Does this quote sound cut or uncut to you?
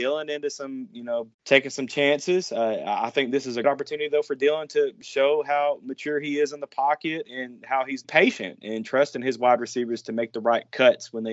cut